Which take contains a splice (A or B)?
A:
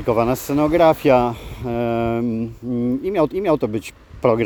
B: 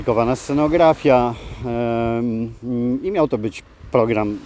A